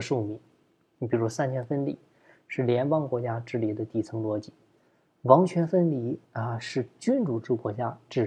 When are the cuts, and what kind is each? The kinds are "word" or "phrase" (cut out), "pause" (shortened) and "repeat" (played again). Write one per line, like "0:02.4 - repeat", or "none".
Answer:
0:06.2 - pause

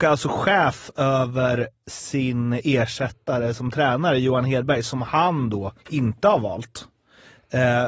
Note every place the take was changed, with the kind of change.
0:05.8 - pause

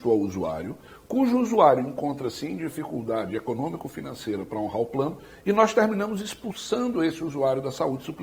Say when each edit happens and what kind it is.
none

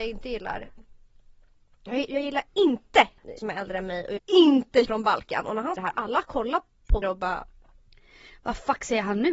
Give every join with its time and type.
0:02.1 - word
0:03.4 - word
0:04.2 - word
0:04.8 - word
0:05.8 - word
0:07.0 - word

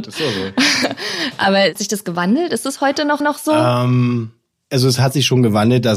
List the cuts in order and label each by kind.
0:01.8 - word
0:03.2 - repeat

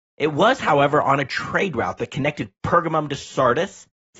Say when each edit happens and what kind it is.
none

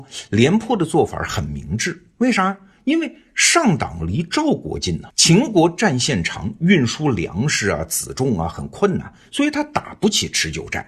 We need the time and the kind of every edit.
0:05.1 - word

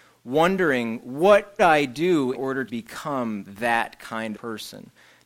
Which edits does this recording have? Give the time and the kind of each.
0:01.6 - word
0:02.3 - word
0:02.7 - word
0:04.3 - word

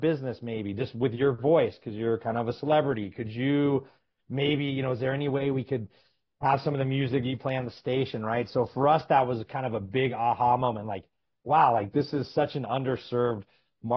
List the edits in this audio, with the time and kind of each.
none

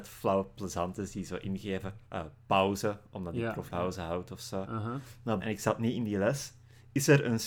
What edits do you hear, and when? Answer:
0:02.0 - pause
0:03.7 - word
0:05.4 - word

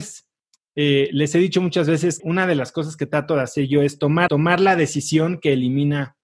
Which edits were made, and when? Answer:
0:02.2 - word
0:04.3 - repeat

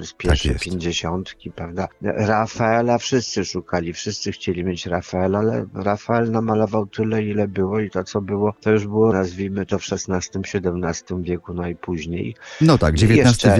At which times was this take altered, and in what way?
0:09.1 - word

